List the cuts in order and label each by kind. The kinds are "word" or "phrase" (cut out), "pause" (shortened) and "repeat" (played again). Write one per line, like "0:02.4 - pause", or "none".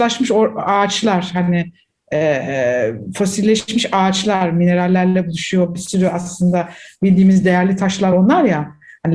none